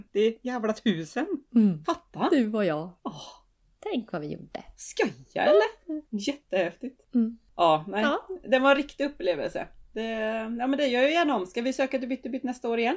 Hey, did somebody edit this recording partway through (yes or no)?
yes